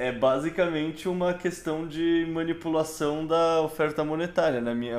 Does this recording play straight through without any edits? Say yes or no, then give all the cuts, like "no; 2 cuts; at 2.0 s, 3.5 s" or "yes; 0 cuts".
yes; 0 cuts